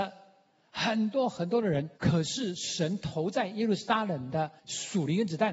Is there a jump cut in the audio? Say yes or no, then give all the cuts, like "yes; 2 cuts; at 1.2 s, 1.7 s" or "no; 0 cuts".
yes; 2 cuts; at 2.0 s, 4.6 s